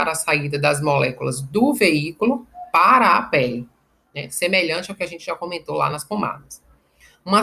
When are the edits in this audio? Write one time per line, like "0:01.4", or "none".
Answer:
none